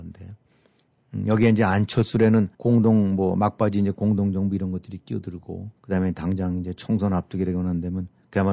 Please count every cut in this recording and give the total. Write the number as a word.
two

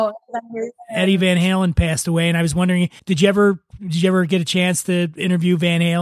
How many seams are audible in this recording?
one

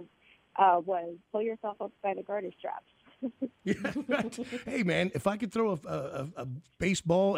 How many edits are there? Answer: one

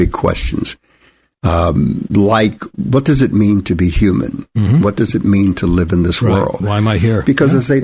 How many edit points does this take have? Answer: zero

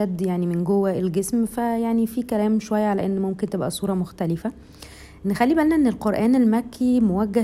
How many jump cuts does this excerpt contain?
zero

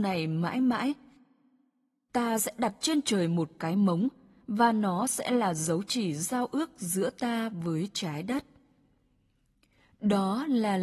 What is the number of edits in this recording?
zero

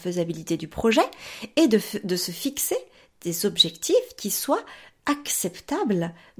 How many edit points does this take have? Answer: zero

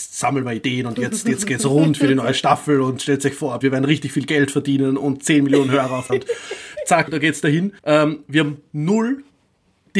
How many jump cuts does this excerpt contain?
four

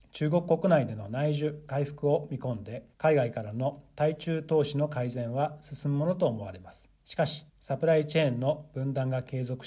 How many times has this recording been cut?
three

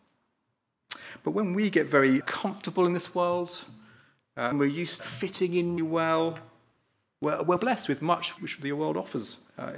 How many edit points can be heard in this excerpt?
six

